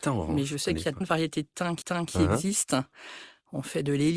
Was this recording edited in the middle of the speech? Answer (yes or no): yes